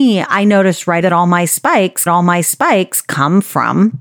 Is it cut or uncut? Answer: cut